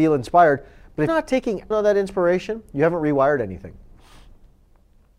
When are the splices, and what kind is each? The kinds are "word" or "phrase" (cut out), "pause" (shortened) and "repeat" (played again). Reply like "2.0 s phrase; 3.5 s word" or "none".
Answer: 1.1 s phrase; 1.7 s word